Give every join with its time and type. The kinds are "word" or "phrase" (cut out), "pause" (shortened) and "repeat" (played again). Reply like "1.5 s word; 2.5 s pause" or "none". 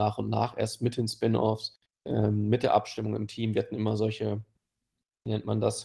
1.9 s pause

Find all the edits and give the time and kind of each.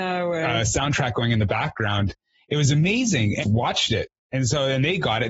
3.4 s phrase

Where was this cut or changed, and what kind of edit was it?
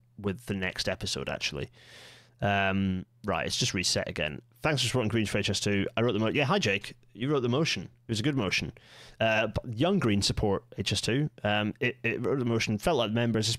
3.1 s pause; 4.5 s pause

